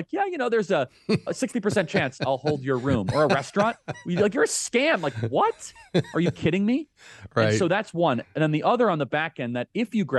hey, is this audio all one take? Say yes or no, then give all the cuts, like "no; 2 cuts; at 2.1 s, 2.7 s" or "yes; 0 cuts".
no; 1 cut; at 1.3 s